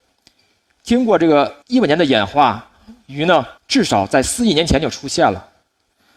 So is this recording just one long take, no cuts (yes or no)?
no